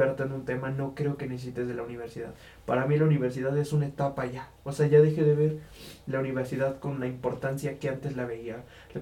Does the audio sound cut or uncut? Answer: uncut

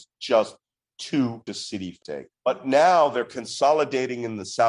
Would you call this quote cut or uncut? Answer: cut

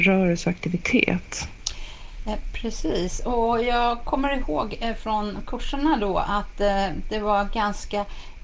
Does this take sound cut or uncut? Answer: uncut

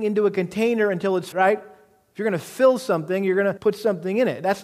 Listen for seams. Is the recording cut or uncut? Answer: cut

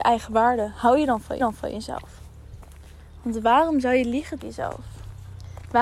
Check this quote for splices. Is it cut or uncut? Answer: cut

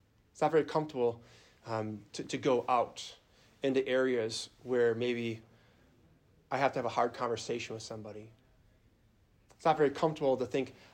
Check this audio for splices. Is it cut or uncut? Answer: uncut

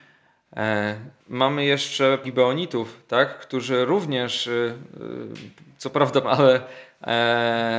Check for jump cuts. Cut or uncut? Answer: cut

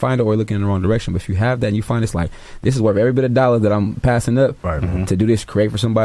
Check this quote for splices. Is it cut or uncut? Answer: uncut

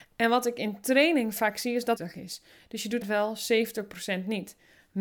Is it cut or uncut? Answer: cut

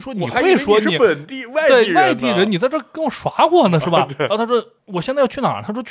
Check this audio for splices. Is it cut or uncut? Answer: uncut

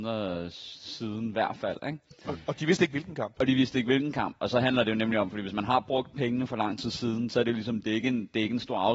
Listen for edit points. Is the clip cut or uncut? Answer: uncut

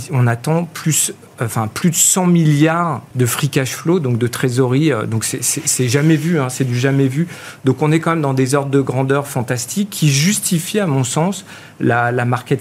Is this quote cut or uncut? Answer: cut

